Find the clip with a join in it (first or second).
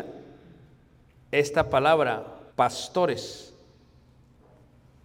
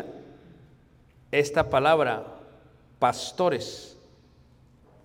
first